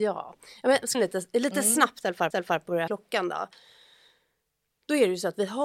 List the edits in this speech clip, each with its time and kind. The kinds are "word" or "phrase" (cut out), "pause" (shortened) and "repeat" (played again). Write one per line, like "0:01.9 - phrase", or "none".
0:00.9 - phrase
0:02.3 - repeat
0:02.9 - phrase